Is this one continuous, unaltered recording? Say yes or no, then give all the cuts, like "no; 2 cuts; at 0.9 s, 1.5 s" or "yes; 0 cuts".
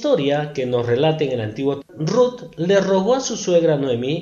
no; 1 cut; at 1.8 s